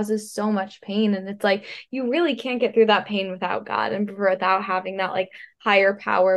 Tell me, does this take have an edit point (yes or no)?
no